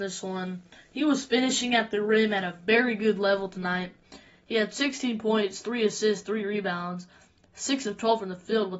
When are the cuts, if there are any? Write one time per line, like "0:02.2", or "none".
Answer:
none